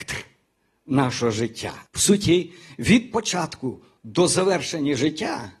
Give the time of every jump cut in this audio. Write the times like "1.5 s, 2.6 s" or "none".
1.9 s